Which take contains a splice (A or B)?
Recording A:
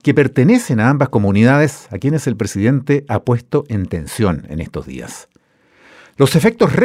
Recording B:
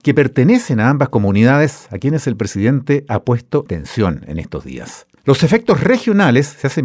B